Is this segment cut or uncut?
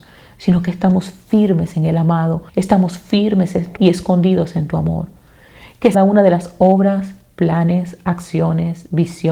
cut